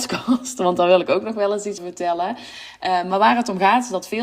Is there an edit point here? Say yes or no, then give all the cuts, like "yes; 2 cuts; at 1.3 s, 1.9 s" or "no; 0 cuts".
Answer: yes; 1 cut; at 1.8 s